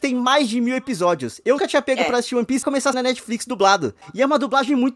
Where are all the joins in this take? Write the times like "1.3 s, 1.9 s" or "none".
1.6 s, 2.6 s, 2.9 s